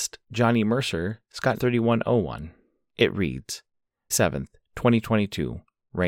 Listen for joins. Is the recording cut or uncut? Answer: cut